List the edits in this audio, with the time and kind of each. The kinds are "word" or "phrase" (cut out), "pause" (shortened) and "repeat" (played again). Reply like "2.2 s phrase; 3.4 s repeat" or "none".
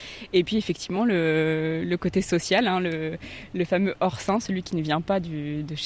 none